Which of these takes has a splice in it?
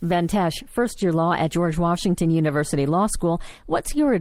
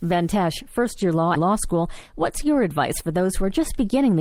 second; 1 cut; at 1.4 s

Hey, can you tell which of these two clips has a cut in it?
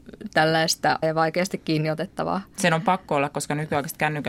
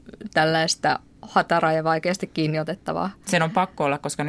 first; 1 cut; at 1.0 s

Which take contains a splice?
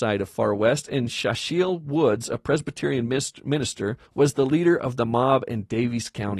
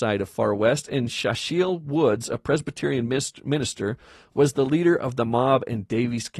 first; 1 cut; at 4.1 s

